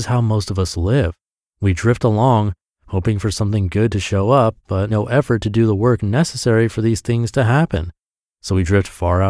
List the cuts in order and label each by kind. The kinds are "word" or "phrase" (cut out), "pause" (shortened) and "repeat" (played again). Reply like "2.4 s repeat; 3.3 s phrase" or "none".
4.9 s word